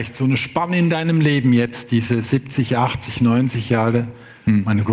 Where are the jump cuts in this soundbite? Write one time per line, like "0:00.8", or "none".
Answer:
none